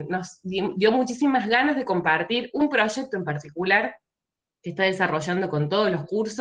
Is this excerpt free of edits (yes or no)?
yes